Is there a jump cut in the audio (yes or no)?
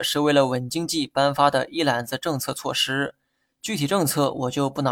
no